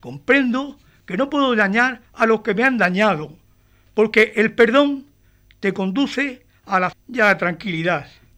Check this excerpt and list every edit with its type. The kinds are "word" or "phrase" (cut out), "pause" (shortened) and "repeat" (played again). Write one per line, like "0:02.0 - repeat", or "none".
0:02.0 - pause
0:06.9 - word